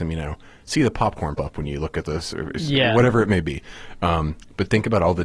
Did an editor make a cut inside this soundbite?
yes; 1 cut; at 1.3 s

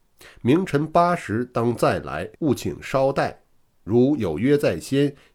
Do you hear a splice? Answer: yes; 1 cut; at 2.3 s

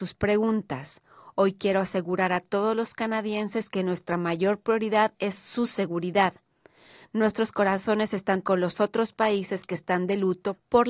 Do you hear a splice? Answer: yes; 1 cut; at 8.4 s

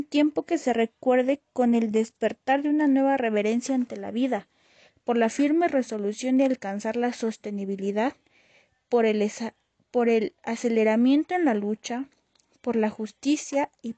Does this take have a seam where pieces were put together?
no; 0 cuts

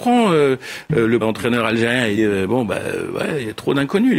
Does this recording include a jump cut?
yes; 2 cuts; at 1.2 s, 2.2 s

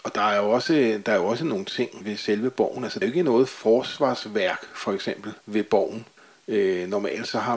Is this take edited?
yes; 4 cuts; at 2.0 s, 3.0 s, 5.4 s, 6.2 s

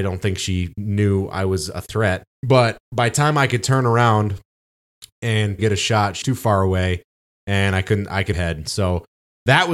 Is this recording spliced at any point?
yes; 4 cuts; at 2.3 s, 5.6 s, 6.2 s, 8.3 s

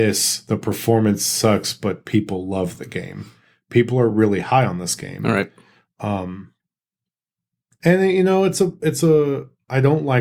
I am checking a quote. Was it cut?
no; 0 cuts

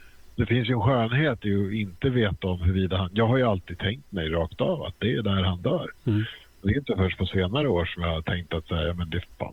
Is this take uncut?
yes; 0 cuts

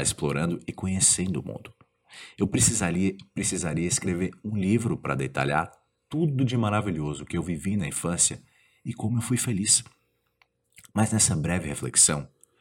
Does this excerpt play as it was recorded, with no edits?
yes; 0 cuts

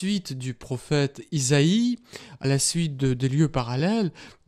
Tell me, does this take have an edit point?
no; 0 cuts

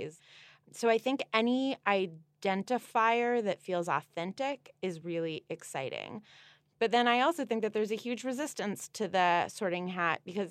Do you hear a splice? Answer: no; 0 cuts

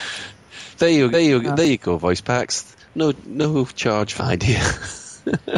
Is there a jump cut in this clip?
yes; 2 cuts; at 1.1 s, 4.2 s

